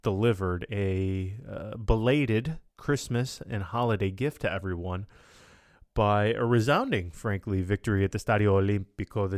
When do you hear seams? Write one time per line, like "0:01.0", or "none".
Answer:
0:02.7